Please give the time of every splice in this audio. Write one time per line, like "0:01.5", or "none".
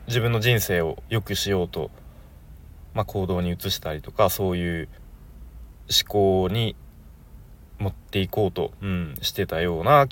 none